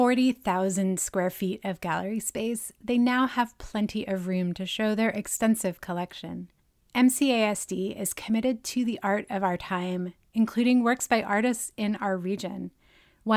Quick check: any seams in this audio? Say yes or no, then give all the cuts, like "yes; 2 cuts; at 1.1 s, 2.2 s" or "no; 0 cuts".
no; 0 cuts